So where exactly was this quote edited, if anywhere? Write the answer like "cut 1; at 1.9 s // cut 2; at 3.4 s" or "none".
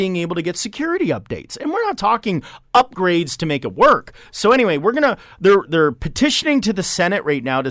cut 1; at 5.6 s